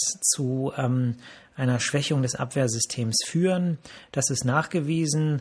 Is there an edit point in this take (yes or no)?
no